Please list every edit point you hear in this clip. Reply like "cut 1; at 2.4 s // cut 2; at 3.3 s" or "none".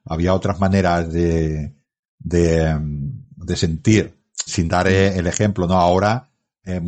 cut 1; at 4.5 s